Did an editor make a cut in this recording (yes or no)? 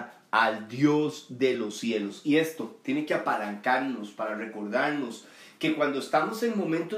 no